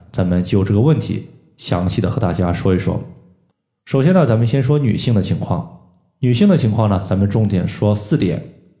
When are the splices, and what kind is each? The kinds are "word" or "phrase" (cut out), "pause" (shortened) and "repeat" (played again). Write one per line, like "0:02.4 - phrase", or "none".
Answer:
none